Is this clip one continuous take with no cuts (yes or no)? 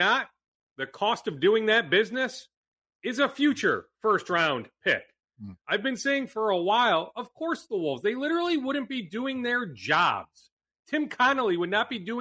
yes